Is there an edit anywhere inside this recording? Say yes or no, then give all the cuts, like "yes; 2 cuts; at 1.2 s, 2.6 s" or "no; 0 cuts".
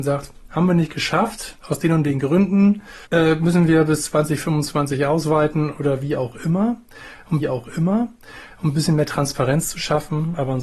yes; 3 cuts; at 1.6 s, 3.0 s, 7.4 s